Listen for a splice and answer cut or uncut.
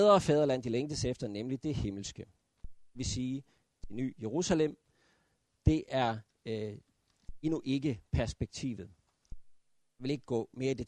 uncut